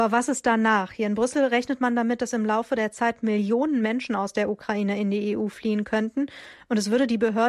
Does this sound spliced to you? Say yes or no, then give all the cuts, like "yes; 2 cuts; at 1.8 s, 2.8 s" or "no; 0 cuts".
no; 0 cuts